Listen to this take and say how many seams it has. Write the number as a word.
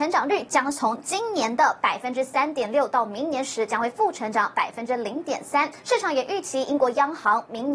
one